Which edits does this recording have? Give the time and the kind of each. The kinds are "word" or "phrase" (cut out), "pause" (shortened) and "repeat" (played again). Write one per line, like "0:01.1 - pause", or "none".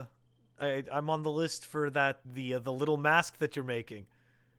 0:02.2 - word